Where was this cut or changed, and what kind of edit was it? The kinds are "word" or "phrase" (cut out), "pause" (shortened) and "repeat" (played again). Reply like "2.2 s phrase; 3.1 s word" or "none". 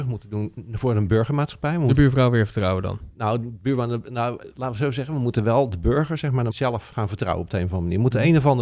1.9 s phrase; 6.5 s word